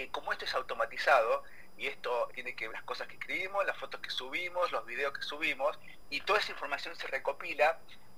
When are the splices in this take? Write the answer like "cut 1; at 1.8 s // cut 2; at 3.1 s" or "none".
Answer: cut 1; at 2.3 s // cut 2; at 2.7 s